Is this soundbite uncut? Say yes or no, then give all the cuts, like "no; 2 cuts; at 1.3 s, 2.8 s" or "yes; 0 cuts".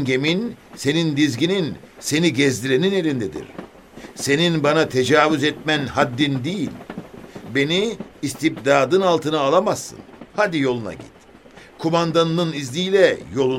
no; 1 cut; at 10.3 s